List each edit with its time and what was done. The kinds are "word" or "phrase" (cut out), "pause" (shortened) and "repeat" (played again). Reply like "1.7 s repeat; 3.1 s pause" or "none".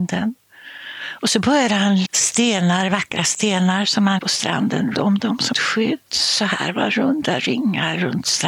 2.0 s word; 4.2 s word; 4.9 s word; 5.5 s word